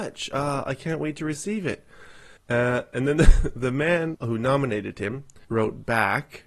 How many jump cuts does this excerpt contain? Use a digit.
3